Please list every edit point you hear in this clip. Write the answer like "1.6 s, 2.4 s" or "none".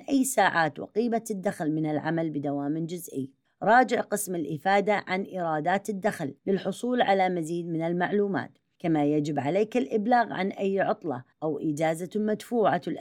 3.4 s, 6.4 s, 11.3 s